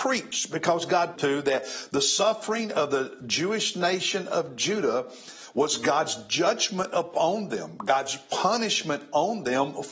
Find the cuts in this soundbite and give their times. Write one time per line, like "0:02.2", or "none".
0:01.2